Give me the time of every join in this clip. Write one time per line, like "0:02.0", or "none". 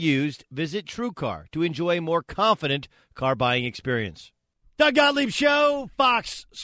none

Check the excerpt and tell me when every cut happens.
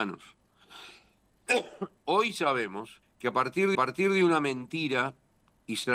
0:02.4
0:03.0
0:03.7

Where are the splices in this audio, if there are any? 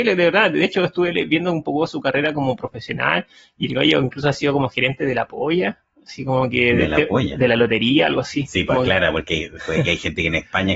none

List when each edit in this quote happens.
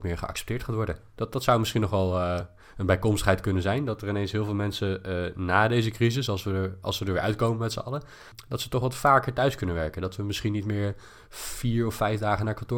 none

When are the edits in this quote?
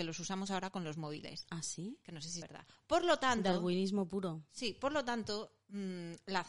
0:02.4

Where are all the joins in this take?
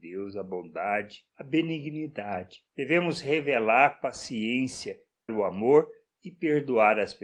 0:05.3

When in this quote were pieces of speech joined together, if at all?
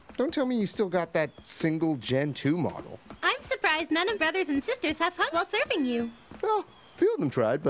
0:04.1
0:05.3

